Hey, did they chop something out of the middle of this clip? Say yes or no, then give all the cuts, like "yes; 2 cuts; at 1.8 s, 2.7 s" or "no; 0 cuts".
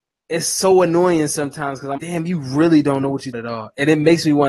yes; 2 cuts; at 2.0 s, 3.3 s